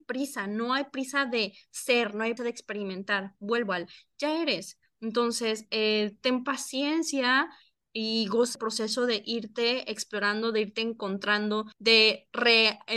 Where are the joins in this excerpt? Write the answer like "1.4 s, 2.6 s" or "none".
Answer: 2.4 s, 8.5 s, 11.7 s